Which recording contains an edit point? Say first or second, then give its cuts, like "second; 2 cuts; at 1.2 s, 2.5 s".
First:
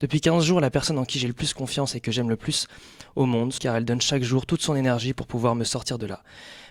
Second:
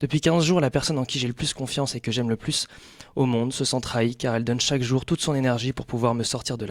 first; 1 cut; at 3.6 s